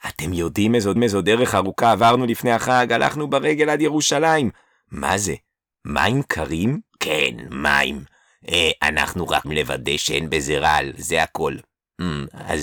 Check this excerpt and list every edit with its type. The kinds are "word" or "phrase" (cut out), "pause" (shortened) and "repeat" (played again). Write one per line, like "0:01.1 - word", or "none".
0:01.0 - repeat
0:06.9 - pause
0:09.4 - word